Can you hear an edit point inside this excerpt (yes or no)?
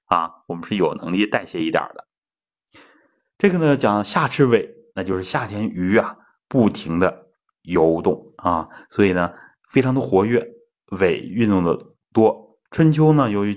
yes